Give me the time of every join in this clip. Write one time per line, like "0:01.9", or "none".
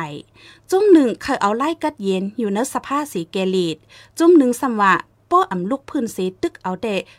none